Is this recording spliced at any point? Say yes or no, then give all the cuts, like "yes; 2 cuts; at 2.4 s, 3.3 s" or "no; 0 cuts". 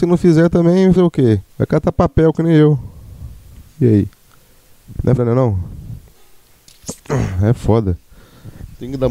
yes; 3 cuts; at 1.0 s, 1.5 s, 5.2 s